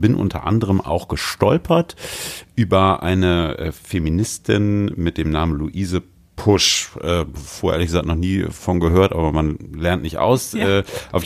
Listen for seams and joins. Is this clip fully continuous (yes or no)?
yes